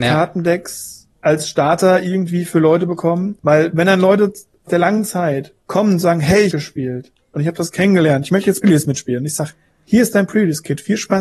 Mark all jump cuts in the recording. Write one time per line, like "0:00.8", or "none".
0:01.1
0:03.4
0:04.7
0:05.6
0:06.5
0:08.6